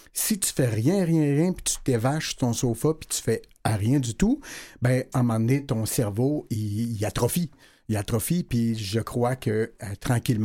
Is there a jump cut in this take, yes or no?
no